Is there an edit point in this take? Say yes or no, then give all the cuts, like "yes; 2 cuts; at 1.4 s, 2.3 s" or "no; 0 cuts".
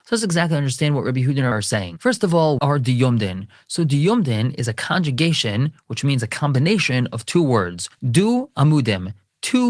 yes; 2 cuts; at 1.5 s, 2.6 s